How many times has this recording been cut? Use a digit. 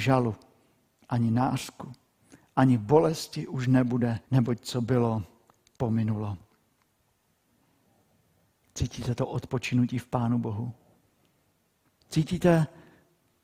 1